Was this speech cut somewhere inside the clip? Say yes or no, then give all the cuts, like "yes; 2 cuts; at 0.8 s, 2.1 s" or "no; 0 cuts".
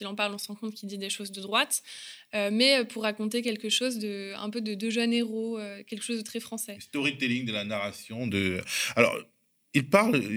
no; 0 cuts